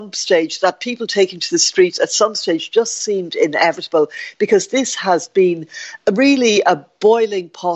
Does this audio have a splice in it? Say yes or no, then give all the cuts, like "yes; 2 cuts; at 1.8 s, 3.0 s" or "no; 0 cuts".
no; 0 cuts